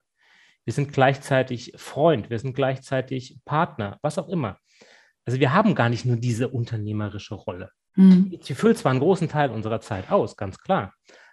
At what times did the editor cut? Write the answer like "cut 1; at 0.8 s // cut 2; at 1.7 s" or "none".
none